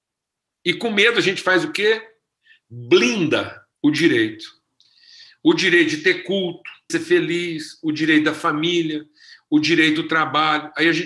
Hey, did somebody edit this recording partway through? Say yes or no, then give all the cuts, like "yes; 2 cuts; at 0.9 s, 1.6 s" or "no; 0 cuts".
yes; 2 cuts; at 3.7 s, 6.9 s